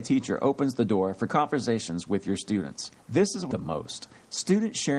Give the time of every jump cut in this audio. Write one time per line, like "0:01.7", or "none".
0:01.3
0:03.0
0:03.5